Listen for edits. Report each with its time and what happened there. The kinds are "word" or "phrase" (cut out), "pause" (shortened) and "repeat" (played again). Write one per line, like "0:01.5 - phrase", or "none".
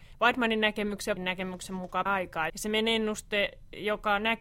0:01.2 - word
0:02.1 - word
0:02.5 - word